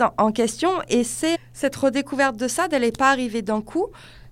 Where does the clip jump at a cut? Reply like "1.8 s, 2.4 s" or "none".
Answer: 1.3 s